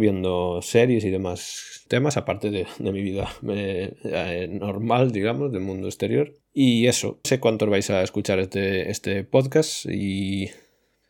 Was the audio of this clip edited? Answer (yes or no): yes